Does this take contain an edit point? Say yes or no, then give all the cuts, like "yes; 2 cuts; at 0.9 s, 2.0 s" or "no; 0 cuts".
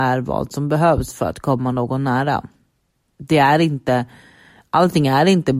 no; 0 cuts